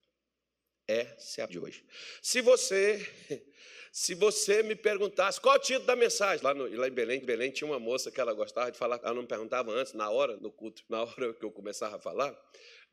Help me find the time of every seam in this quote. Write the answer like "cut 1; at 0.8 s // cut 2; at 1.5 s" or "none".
cut 1; at 1.5 s // cut 2; at 6.4 s // cut 3; at 7.2 s // cut 4; at 9.0 s // cut 5; at 10.4 s // cut 6; at 10.9 s